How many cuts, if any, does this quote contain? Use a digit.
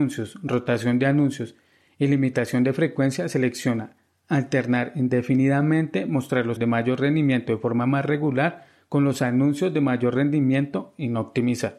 1